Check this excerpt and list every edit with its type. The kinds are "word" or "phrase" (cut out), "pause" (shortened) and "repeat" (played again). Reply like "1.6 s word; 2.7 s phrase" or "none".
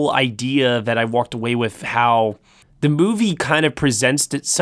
2.6 s pause